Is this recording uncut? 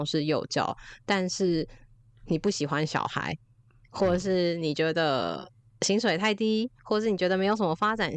no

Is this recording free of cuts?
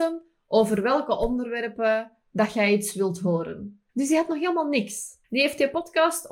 no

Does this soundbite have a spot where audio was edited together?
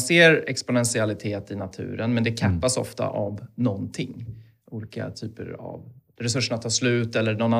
no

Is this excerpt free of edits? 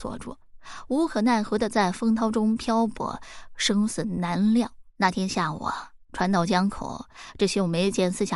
no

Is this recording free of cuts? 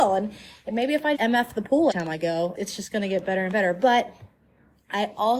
no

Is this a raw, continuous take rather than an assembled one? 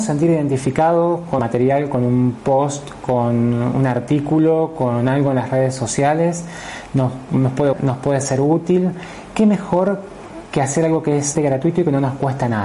no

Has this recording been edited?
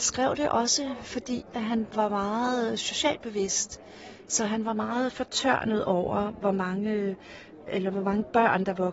yes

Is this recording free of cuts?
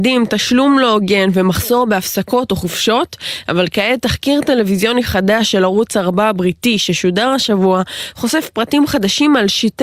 yes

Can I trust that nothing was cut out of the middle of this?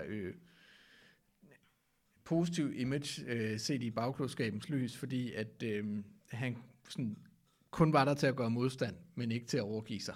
yes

